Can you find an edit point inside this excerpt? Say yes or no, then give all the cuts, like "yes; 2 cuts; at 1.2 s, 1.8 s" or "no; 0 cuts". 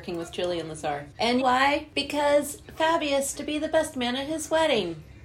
yes; 2 cuts; at 1.4 s, 3.4 s